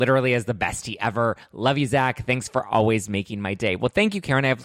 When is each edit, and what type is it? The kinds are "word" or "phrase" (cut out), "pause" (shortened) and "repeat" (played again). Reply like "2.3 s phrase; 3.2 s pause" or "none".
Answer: none